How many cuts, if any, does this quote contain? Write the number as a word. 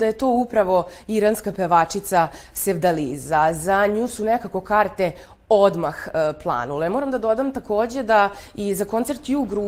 zero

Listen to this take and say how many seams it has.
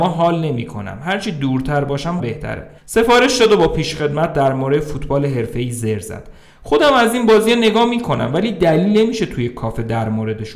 two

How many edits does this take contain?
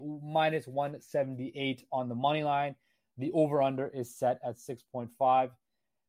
zero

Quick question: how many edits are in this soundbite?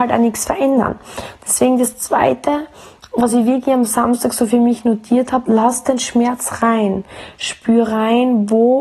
zero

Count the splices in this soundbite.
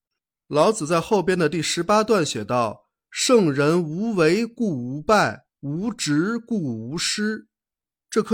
one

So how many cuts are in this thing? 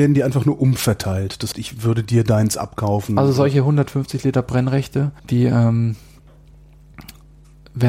two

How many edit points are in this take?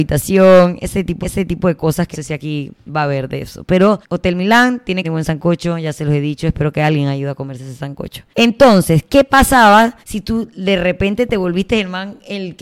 six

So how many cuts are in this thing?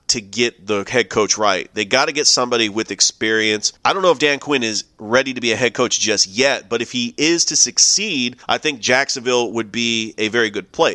two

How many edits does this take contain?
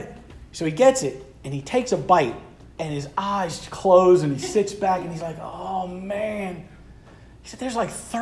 one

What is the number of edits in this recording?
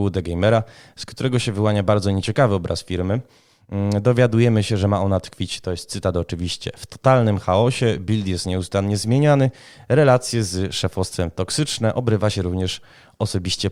zero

